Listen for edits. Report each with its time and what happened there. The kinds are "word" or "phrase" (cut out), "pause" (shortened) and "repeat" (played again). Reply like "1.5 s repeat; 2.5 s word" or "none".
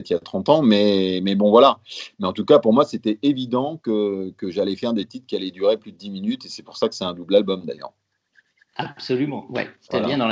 none